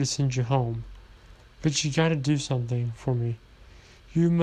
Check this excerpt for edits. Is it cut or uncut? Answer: uncut